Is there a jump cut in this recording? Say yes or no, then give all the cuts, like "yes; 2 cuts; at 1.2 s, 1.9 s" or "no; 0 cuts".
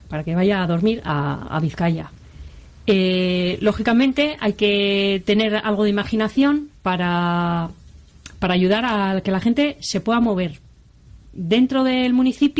yes; 1 cut; at 6.7 s